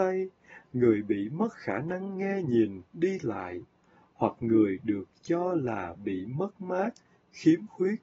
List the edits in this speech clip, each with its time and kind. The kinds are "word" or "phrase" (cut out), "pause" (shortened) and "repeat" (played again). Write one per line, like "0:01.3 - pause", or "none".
none